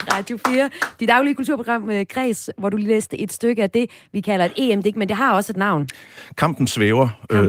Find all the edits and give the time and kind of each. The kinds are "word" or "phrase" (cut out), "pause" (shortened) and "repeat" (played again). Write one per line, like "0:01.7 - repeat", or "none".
none